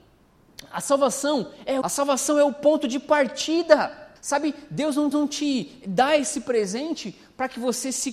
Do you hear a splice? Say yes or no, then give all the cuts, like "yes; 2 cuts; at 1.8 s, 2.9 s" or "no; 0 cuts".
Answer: yes; 3 cuts; at 1.8 s, 4.2 s, 5.1 s